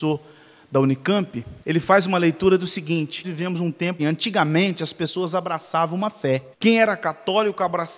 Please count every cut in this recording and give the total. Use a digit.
4